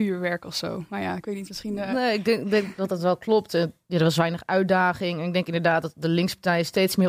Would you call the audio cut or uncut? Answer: uncut